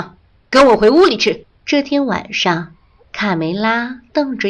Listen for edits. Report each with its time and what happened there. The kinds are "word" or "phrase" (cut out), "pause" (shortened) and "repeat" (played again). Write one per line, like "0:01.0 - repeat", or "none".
0:01.5 - pause
0:03.0 - pause